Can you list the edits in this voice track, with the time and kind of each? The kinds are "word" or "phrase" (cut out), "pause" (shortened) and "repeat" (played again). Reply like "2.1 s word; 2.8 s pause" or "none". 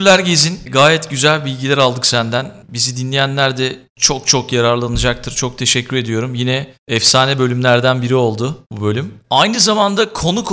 none